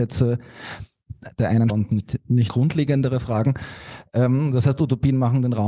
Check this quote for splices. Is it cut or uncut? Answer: cut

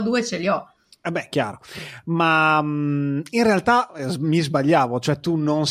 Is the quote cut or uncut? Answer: uncut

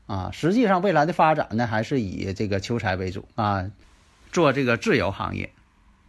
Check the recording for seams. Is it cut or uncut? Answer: cut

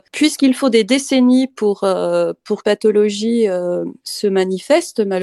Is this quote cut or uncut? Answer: cut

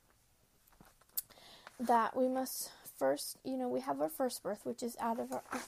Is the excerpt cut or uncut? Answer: uncut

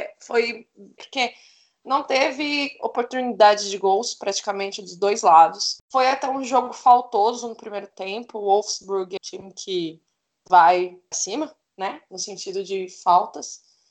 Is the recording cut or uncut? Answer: cut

